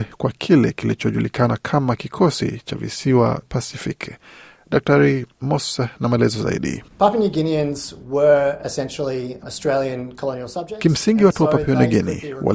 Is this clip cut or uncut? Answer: cut